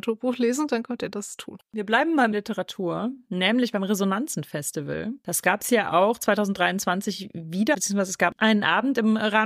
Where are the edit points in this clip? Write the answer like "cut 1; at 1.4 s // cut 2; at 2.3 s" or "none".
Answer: cut 1; at 1.6 s // cut 2; at 2.3 s // cut 3; at 7.7 s